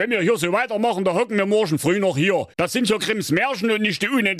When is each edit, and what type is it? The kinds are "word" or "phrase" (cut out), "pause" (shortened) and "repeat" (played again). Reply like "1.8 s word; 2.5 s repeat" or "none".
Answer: 2.5 s pause